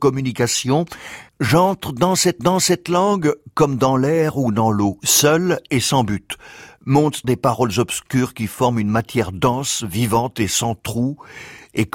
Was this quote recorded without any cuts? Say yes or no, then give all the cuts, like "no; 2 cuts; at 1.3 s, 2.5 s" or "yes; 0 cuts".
no; 3 cuts; at 1.3 s, 2.4 s, 7.2 s